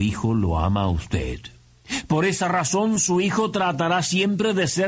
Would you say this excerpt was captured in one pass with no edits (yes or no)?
yes